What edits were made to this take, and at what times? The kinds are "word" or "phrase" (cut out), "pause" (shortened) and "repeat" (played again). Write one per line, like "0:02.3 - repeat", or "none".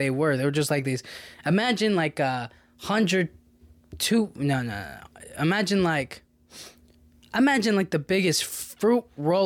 none